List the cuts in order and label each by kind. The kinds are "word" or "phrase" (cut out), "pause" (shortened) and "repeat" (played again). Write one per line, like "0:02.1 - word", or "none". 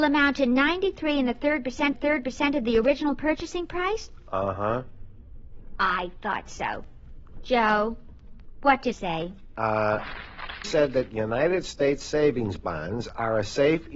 0:01.9 - repeat
0:08.9 - word
0:10.6 - word

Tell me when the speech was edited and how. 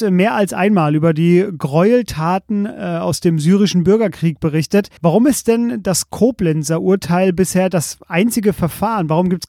0:05.0 - pause

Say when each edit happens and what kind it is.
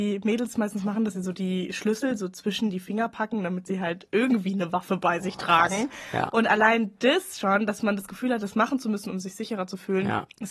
none

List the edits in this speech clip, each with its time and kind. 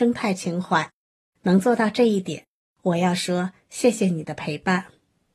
none

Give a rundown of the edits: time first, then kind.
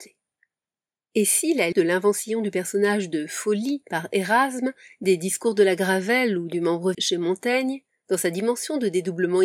0:01.7 - word
0:06.9 - word

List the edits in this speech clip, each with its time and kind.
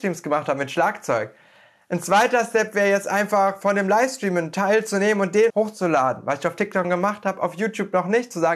0:05.5 - word
0:06.8 - word

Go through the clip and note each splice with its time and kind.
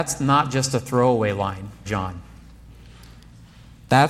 0:01.9 - word

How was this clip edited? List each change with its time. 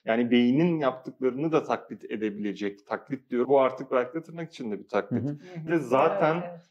0:03.4 - word
0:05.7 - word

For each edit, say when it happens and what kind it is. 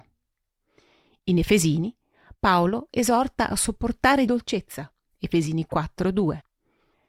0:04.3 - phrase

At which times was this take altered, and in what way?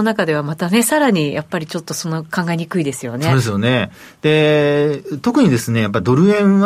none

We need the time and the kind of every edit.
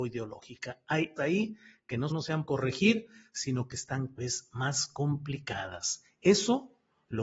0:01.2 - word
0:02.1 - word
0:02.5 - word
0:04.2 - word

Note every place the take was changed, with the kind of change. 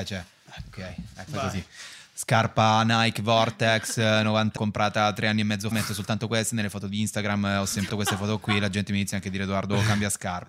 0:01.3 - word
0:04.6 - word
0:05.7 - word
0:07.9 - word

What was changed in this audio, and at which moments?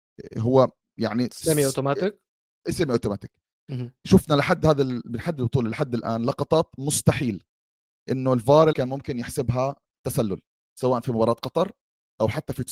0:08.7 - word

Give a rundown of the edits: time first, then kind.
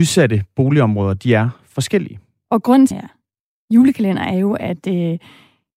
0:02.9 - phrase

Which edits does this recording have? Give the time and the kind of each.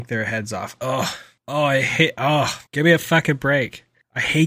0:02.7 - pause

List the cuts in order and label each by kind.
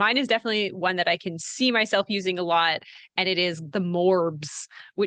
0:03.7 - word

